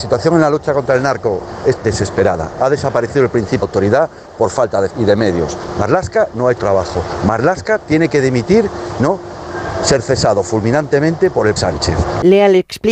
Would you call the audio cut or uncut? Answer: cut